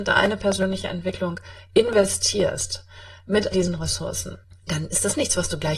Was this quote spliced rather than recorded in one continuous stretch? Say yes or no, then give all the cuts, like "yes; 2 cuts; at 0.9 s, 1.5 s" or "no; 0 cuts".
yes; 2 cuts; at 3.5 s, 4.4 s